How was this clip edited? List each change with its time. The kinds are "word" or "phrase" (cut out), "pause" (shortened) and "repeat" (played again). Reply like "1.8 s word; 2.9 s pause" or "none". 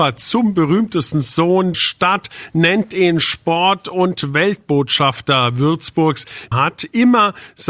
1.7 s word; 6.5 s phrase